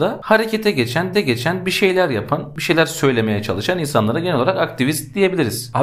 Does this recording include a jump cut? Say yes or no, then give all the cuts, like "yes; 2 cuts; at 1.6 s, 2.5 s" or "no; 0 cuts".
yes; 1 cut; at 1.1 s